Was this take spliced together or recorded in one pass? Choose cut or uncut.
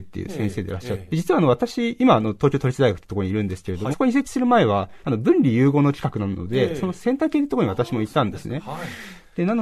cut